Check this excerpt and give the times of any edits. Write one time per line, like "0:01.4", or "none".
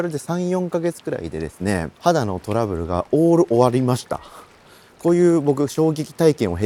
0:02.0